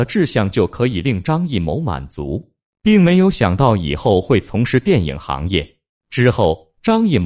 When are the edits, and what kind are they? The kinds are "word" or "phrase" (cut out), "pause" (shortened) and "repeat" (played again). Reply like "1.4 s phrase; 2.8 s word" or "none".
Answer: none